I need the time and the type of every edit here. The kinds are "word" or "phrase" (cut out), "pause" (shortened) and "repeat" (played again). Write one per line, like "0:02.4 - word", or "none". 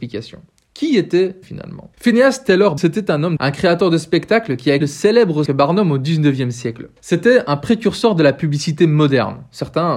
0:01.4 - word
0:01.9 - pause
0:02.8 - word
0:03.4 - phrase
0:04.8 - word
0:05.5 - word
0:07.0 - pause